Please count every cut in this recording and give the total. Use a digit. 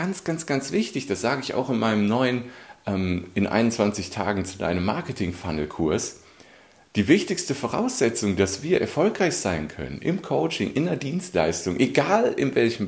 0